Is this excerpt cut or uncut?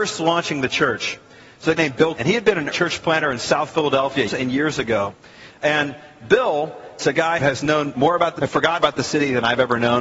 cut